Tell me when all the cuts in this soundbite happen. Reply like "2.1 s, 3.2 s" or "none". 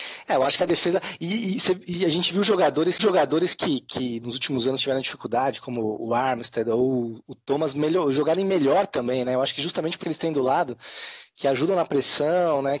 3.0 s, 10.0 s